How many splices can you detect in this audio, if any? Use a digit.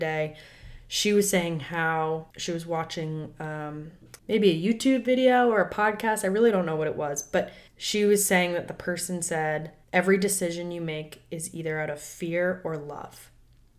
4